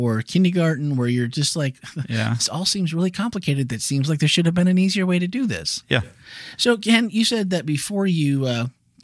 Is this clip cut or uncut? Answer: uncut